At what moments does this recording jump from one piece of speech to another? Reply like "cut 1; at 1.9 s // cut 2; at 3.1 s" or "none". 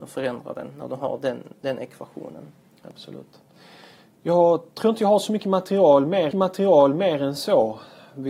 cut 1; at 6.3 s